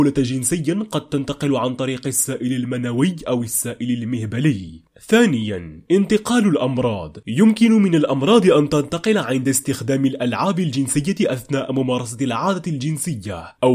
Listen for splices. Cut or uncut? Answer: uncut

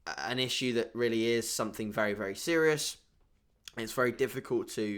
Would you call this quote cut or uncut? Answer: uncut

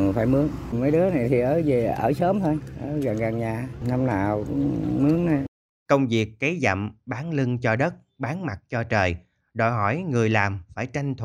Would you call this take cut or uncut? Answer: uncut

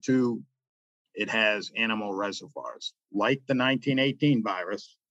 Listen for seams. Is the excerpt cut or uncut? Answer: uncut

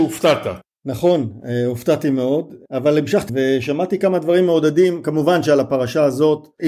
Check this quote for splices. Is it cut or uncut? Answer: cut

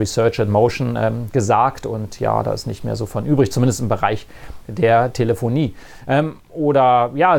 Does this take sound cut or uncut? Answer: cut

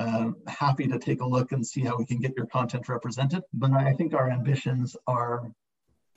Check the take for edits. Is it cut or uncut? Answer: cut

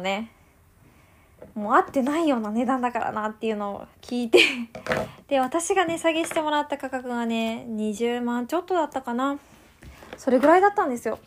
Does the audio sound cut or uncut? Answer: cut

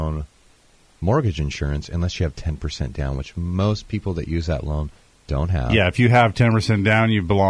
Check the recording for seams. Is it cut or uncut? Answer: uncut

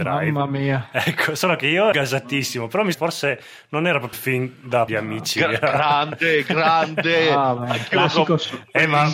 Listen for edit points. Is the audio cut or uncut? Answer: cut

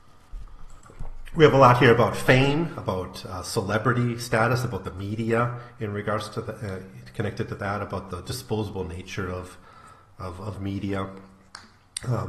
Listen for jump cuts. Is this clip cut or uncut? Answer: uncut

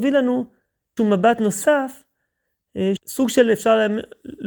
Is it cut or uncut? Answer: cut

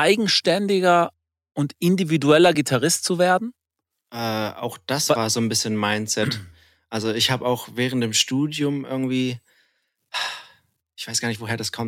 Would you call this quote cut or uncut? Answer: uncut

